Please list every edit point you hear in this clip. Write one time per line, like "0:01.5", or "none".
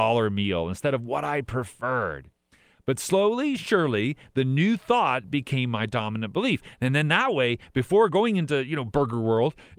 none